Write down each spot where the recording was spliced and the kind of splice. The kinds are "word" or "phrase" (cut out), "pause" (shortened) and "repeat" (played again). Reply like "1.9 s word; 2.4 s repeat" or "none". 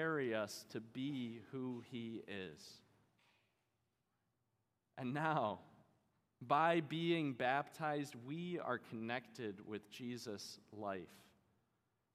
none